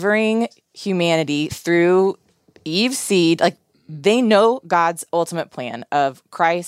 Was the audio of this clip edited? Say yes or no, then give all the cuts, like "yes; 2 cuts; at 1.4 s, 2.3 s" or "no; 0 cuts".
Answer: no; 0 cuts